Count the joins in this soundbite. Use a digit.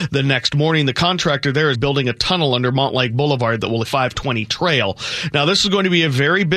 2